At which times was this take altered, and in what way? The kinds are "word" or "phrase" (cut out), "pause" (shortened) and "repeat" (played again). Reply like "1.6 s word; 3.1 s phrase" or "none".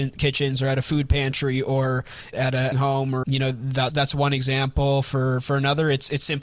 2.3 s word; 2.7 s phrase; 3.2 s phrase; 3.9 s word